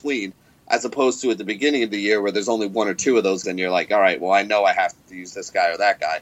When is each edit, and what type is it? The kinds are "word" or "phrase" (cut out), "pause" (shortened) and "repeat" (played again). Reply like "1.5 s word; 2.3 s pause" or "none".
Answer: 3.4 s word